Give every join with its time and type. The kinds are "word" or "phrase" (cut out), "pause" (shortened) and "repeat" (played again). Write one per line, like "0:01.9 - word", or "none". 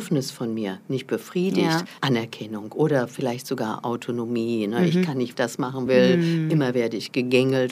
0:02.0 - pause
0:05.3 - word
0:05.9 - phrase